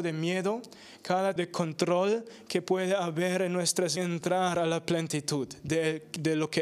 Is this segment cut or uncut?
cut